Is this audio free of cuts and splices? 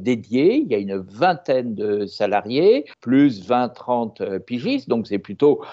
no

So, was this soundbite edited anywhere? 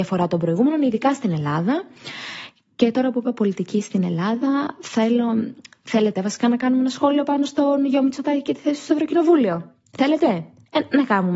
no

